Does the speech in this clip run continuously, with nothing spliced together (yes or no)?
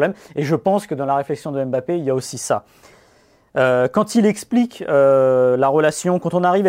yes